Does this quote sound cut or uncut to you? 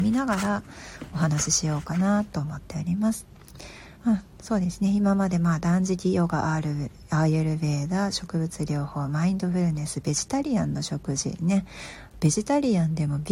cut